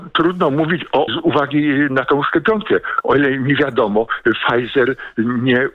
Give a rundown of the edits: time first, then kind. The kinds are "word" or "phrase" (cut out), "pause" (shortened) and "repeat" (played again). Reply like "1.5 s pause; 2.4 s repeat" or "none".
1.1 s phrase

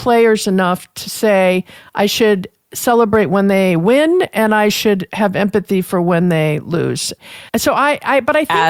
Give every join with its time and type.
7.5 s pause

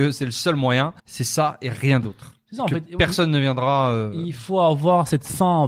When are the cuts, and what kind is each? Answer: 1.0 s pause

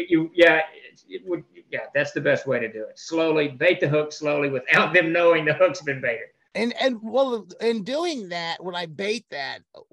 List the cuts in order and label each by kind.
none

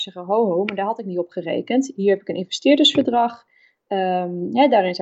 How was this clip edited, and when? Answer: none

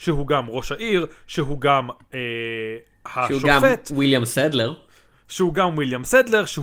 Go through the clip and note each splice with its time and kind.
none

